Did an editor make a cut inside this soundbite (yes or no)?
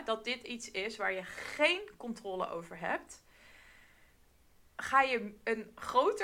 no